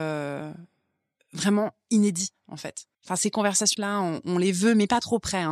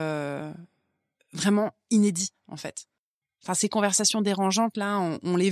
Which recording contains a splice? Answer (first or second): first